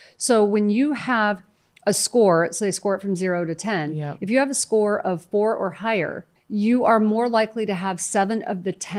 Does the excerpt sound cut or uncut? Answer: cut